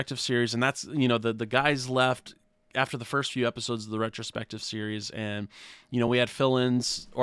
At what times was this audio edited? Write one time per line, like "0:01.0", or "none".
none